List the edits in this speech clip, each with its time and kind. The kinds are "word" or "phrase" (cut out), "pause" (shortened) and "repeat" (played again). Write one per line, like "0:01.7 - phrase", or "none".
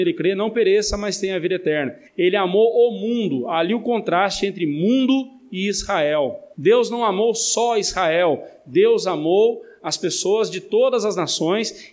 0:02.1 - pause
0:06.5 - pause